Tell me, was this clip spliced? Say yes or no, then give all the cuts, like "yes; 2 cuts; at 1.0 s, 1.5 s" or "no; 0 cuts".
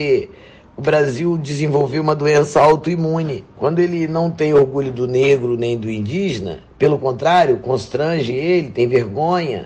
yes; 2 cuts; at 3.5 s, 6.7 s